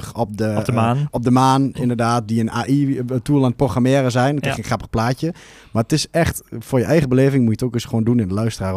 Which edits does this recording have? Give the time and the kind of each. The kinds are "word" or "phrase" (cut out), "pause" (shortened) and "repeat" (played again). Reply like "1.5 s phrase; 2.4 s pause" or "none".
none